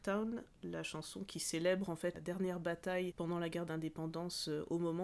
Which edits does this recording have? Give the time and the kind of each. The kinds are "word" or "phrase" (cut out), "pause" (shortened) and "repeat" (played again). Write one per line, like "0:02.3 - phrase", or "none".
0:02.1 - word